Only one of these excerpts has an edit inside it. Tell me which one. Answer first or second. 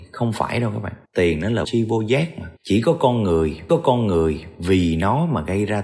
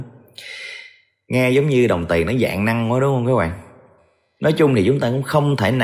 first